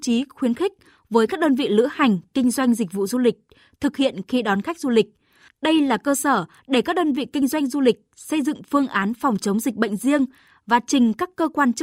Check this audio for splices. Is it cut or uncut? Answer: uncut